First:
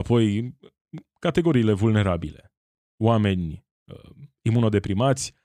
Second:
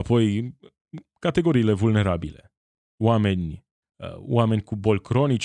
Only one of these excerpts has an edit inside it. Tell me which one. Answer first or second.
second